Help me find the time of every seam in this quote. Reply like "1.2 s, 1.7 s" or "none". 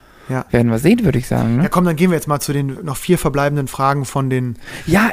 2.8 s